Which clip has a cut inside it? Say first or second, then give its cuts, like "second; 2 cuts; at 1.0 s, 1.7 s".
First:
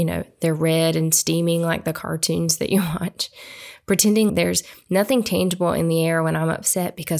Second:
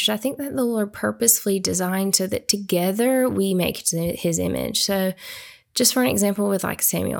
first; 1 cut; at 4.3 s